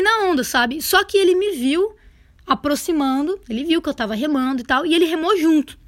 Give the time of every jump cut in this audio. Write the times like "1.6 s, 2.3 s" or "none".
3.4 s